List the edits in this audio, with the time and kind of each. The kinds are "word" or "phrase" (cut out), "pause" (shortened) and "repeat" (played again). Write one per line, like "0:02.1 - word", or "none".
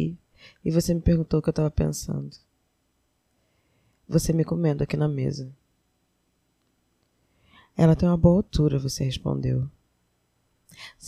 none